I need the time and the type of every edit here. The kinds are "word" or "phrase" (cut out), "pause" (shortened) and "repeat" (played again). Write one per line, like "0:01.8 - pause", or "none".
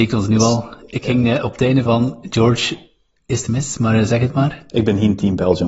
0:01.9 - word
0:03.5 - word